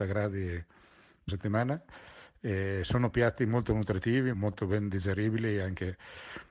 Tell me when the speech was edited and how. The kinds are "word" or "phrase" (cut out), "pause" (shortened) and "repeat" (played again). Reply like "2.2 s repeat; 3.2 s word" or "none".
1.3 s phrase; 4.3 s word

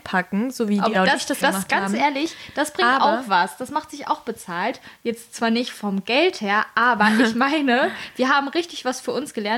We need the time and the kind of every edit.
0.9 s word; 1.4 s word

